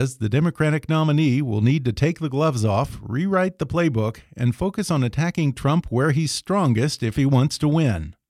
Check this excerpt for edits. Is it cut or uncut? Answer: uncut